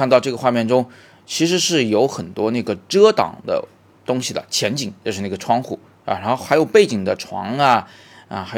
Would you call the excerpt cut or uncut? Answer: uncut